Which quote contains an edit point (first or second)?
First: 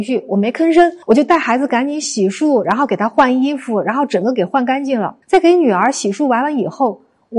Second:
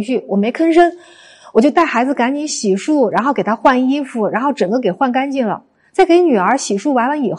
first